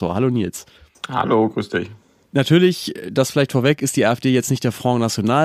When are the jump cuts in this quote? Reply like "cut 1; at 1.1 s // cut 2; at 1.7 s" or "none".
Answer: none